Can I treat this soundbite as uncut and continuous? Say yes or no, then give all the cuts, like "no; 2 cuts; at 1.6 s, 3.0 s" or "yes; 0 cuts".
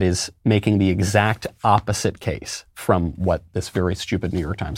yes; 0 cuts